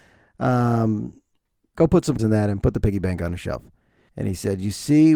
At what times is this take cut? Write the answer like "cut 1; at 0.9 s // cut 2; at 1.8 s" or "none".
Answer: cut 1; at 2.2 s